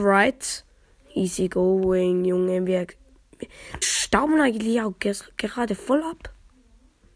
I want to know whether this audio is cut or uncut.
cut